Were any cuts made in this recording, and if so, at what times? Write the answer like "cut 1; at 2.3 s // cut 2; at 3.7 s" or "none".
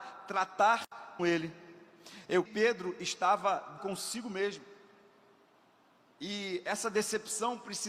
cut 1; at 1.2 s // cut 2; at 2.5 s // cut 3; at 3.8 s